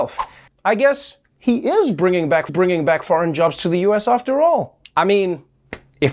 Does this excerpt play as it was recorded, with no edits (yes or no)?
no